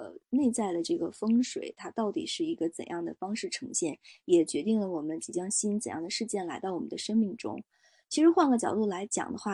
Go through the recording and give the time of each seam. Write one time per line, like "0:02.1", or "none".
none